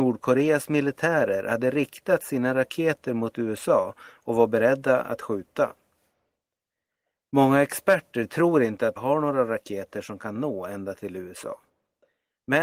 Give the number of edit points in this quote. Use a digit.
1